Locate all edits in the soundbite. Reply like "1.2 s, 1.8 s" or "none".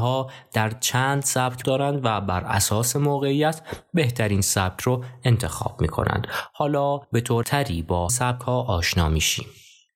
1.6 s, 7.0 s, 7.4 s, 8.1 s